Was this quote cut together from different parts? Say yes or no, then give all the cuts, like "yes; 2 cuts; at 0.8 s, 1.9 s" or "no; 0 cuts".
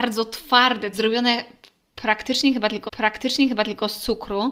yes; 2 cuts; at 0.9 s, 2.9 s